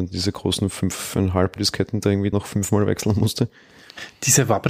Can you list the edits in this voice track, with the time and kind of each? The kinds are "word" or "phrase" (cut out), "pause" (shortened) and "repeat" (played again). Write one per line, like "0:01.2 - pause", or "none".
0:01.6 - word
0:02.3 - word